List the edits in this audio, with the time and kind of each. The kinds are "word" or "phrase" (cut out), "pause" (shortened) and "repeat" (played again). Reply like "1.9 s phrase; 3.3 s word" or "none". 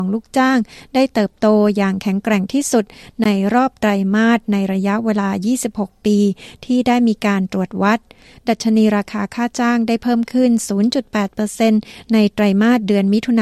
none